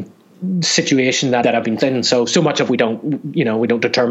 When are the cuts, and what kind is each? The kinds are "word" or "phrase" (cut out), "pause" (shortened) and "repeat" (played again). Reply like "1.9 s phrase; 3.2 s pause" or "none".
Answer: 1.4 s word; 1.8 s word; 2.7 s word

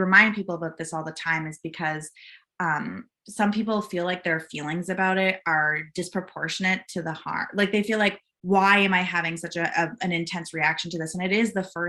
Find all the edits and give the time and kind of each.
none

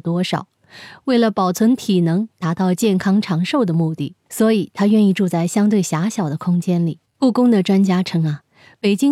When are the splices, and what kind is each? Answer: 4.2 s pause; 7.1 s pause

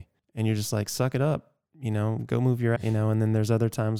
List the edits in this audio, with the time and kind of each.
1.7 s pause; 2.8 s word

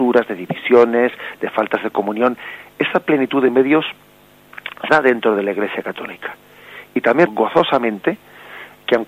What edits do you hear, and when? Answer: 4.9 s word; 7.3 s word

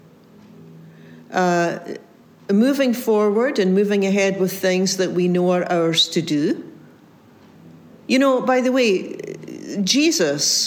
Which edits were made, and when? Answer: none

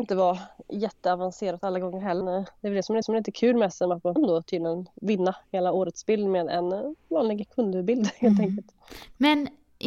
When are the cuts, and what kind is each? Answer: 2.2 s word; 3.0 s repeat; 4.2 s phrase

